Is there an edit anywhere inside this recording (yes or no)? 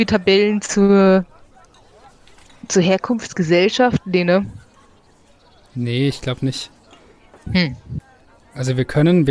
no